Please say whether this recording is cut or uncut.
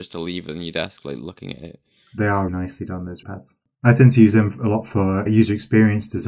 cut